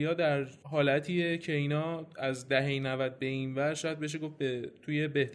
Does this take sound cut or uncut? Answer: uncut